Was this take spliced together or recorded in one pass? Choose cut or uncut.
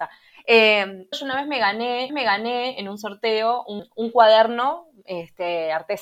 cut